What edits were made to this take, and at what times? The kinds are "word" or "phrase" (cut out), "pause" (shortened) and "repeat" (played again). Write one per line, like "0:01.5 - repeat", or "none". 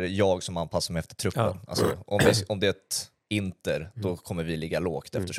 none